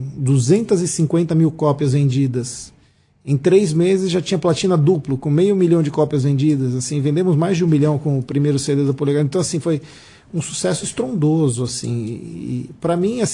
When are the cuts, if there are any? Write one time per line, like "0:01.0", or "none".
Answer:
none